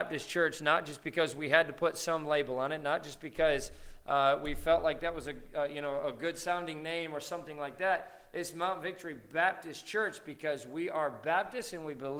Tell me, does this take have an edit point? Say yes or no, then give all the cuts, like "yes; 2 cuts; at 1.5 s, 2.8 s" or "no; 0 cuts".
no; 0 cuts